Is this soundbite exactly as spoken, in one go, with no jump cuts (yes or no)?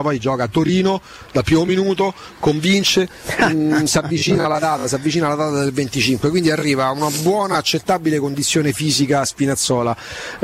yes